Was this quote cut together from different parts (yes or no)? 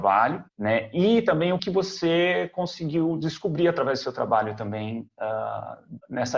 yes